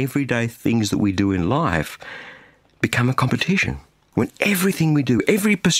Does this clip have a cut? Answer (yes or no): no